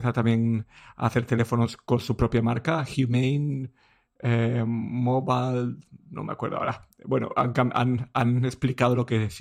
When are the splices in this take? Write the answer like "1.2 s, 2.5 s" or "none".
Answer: none